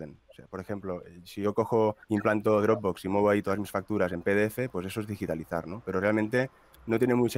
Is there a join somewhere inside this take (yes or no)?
yes